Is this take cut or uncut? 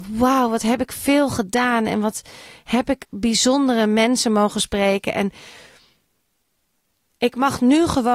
uncut